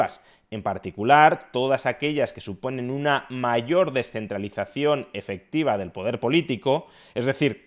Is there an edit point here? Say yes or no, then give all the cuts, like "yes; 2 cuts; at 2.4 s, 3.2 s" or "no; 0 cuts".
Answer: no; 0 cuts